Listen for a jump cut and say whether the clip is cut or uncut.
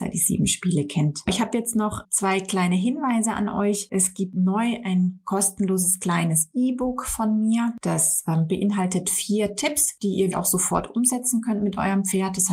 cut